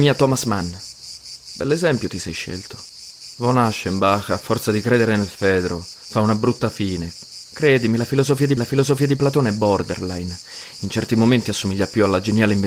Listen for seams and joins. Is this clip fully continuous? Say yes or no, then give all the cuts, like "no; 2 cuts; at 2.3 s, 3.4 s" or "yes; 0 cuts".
no; 1 cut; at 8.6 s